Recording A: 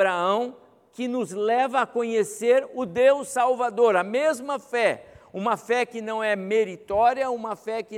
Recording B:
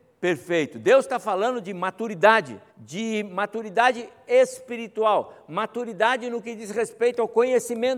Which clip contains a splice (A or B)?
B